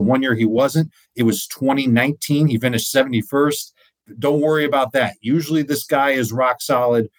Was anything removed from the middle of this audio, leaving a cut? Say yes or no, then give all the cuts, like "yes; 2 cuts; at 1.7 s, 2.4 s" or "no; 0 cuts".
no; 0 cuts